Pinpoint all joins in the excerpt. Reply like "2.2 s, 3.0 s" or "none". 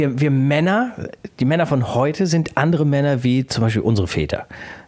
none